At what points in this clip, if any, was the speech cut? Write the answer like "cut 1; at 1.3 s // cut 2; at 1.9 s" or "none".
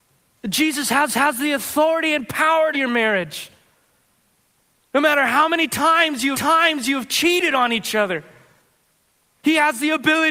cut 1; at 1.1 s // cut 2; at 2.7 s // cut 3; at 6.3 s